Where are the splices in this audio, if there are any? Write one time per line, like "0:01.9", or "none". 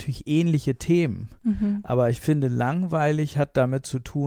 none